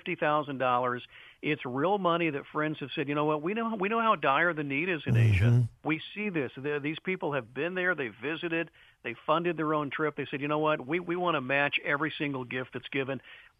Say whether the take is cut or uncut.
uncut